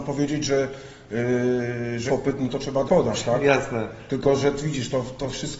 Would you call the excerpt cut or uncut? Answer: cut